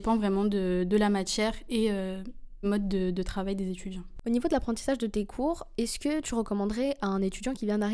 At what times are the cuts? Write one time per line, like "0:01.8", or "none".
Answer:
0:02.6